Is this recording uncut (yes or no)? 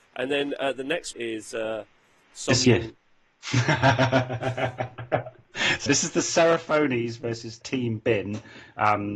no